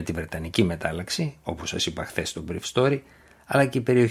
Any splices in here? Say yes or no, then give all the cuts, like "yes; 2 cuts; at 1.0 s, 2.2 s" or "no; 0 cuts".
no; 0 cuts